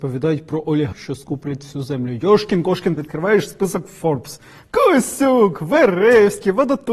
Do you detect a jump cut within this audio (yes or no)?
yes